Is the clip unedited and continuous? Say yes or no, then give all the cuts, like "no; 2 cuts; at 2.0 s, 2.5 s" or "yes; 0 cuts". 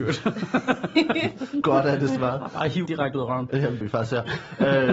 no; 3 cuts; at 1.6 s, 2.9 s, 3.8 s